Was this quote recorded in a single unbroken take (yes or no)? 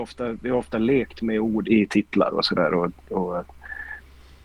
no